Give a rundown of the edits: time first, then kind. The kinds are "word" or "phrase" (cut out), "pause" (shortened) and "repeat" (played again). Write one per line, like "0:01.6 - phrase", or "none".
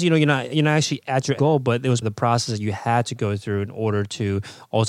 0:01.4 - word
0:02.0 - word